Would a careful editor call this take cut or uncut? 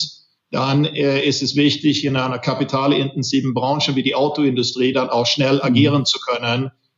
uncut